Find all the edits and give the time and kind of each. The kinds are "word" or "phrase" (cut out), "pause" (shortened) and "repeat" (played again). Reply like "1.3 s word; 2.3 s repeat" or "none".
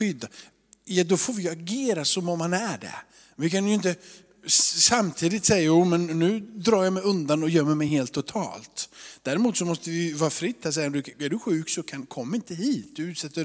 none